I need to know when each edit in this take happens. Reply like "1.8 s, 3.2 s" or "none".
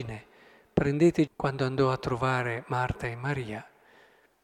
1.3 s